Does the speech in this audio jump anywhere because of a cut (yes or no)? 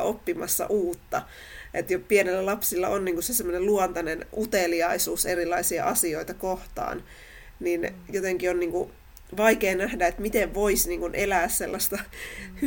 no